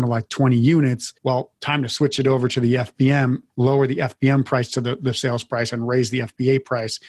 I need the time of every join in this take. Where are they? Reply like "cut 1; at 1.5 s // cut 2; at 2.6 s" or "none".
cut 1; at 1.2 s // cut 2; at 3.5 s

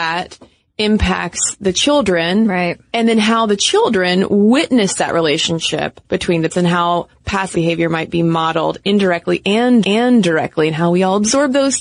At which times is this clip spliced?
cut 1; at 6.0 s // cut 2; at 6.5 s // cut 3; at 7.5 s // cut 4; at 9.8 s

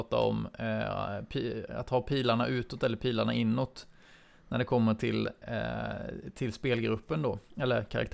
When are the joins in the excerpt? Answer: none

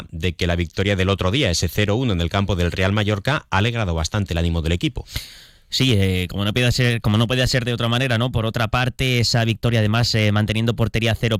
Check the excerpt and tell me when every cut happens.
none

